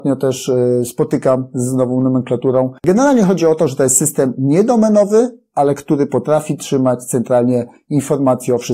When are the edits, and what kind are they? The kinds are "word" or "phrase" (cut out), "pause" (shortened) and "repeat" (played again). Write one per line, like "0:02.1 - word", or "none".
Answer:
none